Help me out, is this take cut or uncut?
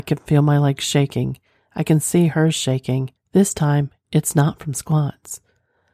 cut